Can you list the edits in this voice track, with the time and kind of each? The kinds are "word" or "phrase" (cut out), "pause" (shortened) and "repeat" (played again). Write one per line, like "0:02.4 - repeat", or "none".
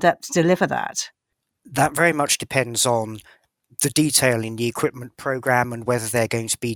none